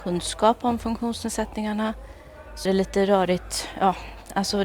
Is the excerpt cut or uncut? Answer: cut